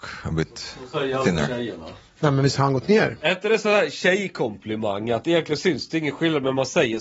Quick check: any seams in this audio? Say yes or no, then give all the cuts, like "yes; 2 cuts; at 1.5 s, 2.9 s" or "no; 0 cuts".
no; 0 cuts